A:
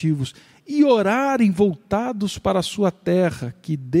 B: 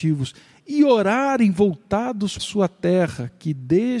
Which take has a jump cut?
B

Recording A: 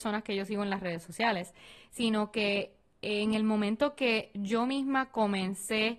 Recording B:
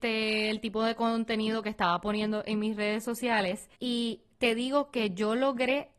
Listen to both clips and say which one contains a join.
B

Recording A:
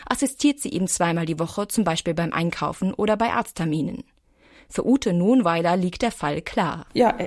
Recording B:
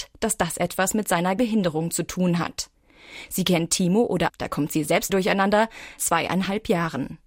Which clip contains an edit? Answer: B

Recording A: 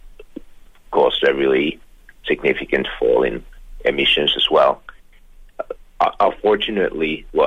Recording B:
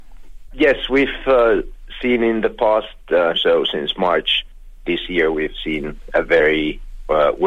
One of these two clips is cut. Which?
B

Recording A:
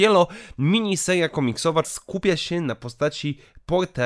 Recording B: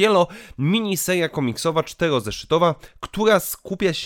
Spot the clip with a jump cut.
A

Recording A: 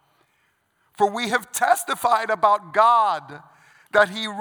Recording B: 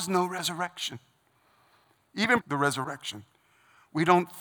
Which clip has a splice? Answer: B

